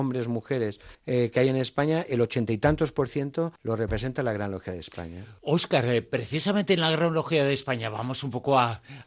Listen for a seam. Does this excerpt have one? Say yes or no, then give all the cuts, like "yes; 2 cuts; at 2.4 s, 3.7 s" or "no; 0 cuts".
yes; 3 cuts; at 0.9 s, 3.6 s, 5.4 s